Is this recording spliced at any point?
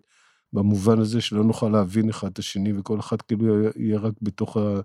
no; 0 cuts

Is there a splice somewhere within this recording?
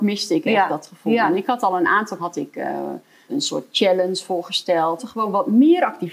yes; 3 cuts; at 2.2 s, 3.3 s, 5.0 s

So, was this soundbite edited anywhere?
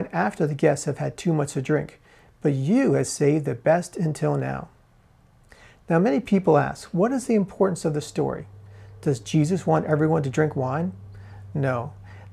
no; 0 cuts

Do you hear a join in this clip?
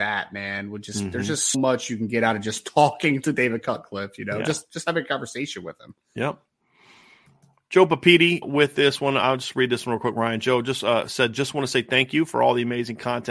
yes; 2 cuts; at 1.5 s, 8.4 s

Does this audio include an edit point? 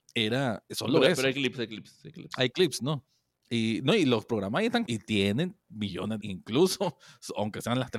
yes; 2 cuts; at 4.8 s, 6.2 s

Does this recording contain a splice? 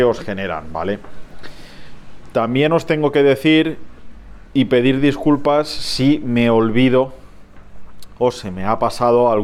no; 0 cuts

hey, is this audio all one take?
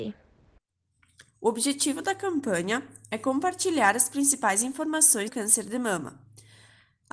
no; 1 cut; at 5.3 s

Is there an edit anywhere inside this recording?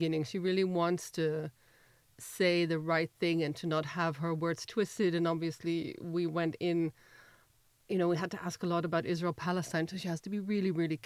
no; 0 cuts

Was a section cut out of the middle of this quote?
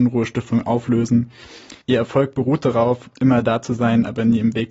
yes; 2 cuts; at 1.8 s, 3.2 s

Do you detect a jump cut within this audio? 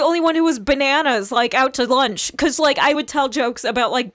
yes; 1 cut; at 2.9 s

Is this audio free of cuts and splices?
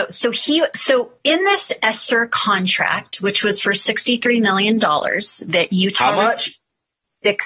yes; 0 cuts

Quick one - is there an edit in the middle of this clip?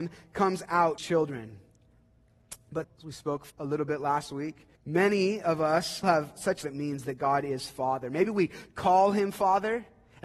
yes; 6 cuts; at 1.0 s, 2.8 s, 3.5 s, 4.8 s, 6.0 s, 6.6 s

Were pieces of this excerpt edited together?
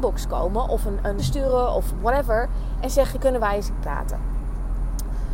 yes; 3 cuts; at 1.2 s, 3.2 s, 3.8 s

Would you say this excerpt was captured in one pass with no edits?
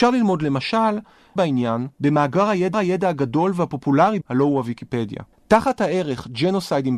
no; 5 cuts; at 1.4 s, 1.9 s, 2.7 s, 4.2 s, 5.3 s

